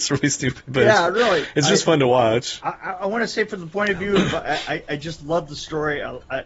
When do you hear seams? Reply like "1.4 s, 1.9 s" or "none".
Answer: none